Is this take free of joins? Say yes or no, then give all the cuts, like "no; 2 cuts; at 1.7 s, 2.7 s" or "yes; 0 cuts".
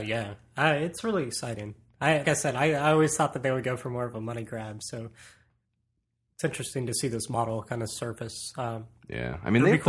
no; 1 cut; at 2.2 s